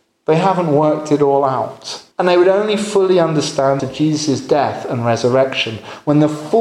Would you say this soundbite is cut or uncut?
cut